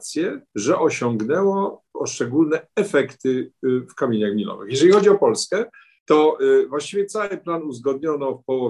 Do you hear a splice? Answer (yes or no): no